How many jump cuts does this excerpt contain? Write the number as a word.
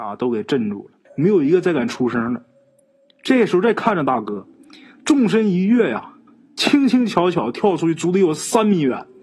two